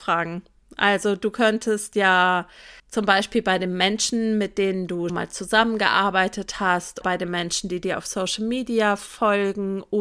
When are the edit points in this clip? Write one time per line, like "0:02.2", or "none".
0:02.8
0:05.1
0:07.0